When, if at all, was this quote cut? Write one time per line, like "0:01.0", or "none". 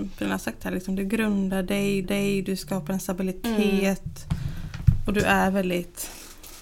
0:02.0